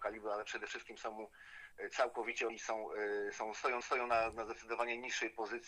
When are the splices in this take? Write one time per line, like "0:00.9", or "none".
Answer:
0:02.5
0:03.8